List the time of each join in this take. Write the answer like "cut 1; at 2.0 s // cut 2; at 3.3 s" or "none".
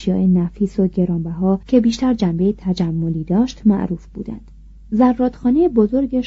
cut 1; at 1.6 s // cut 2; at 4.8 s